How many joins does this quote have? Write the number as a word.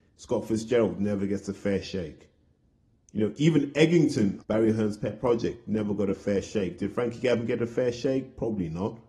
one